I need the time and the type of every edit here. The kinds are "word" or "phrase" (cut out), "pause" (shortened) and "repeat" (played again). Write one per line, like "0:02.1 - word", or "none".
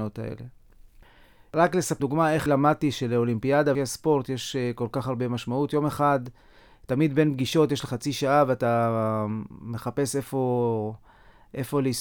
0:02.0 - word
0:02.5 - word
0:03.7 - word
0:07.9 - word